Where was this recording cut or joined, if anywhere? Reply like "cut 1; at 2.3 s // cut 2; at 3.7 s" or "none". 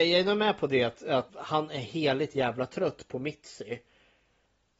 cut 1; at 1.3 s